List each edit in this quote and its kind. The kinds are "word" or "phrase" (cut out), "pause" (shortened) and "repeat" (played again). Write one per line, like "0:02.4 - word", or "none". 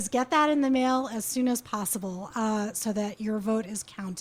none